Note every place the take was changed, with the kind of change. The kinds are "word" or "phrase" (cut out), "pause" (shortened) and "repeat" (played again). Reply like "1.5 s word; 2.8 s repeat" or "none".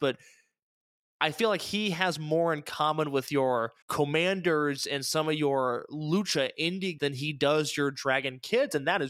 3.8 s pause; 7.0 s word